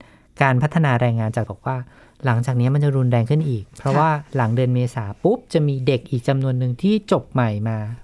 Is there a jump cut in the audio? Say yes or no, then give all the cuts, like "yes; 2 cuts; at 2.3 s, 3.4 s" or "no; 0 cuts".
yes; 1 cut; at 1.5 s